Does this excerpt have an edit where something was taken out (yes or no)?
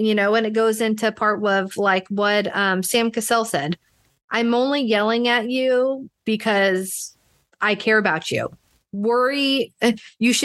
no